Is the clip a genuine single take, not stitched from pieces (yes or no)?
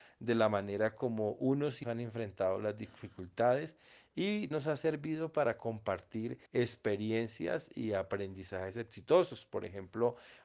no